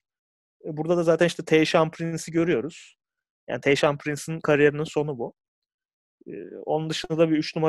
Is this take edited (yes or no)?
no